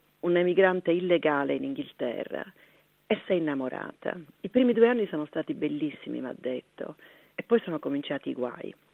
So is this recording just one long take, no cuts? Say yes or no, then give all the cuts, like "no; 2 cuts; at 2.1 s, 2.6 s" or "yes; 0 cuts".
yes; 0 cuts